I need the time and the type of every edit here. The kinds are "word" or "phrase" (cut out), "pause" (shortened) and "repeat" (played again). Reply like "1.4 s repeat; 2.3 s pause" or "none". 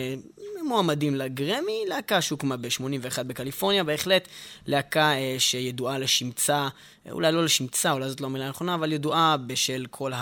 none